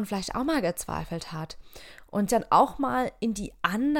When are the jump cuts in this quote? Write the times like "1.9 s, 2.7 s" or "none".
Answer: 2.3 s